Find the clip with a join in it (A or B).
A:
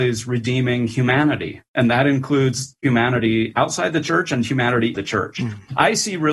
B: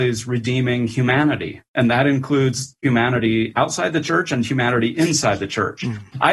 A